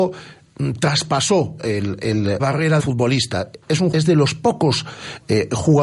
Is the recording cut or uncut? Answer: cut